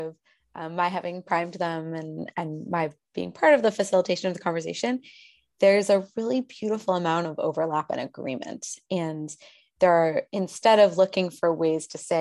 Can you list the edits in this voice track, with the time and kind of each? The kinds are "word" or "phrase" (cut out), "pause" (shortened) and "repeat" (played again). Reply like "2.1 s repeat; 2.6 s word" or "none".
none